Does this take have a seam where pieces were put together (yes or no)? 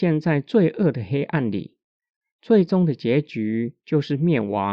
no